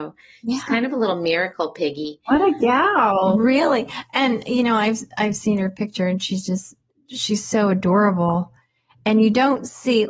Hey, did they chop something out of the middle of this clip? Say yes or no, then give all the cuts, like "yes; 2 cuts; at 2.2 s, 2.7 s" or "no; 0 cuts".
no; 0 cuts